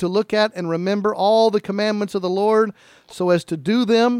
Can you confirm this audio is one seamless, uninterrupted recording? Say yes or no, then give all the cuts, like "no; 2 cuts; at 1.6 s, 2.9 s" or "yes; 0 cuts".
yes; 0 cuts